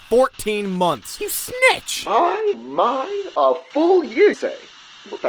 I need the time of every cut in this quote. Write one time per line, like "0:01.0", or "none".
0:02.5
0:04.3